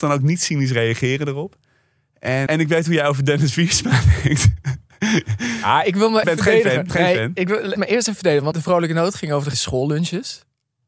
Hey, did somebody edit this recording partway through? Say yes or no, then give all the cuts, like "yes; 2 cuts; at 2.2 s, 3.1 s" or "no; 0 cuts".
yes; 6 cuts; at 2.5 s, 6.2 s, 6.9 s, 7.8 s, 8.5 s, 9.5 s